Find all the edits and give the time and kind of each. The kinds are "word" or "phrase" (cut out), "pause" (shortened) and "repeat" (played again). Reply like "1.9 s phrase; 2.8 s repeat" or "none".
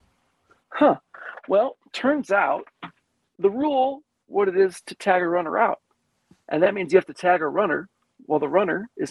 3.4 s word; 4.2 s word